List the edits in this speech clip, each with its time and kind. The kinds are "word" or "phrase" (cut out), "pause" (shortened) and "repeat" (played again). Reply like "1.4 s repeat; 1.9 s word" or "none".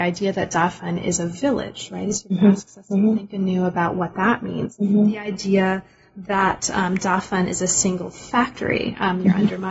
none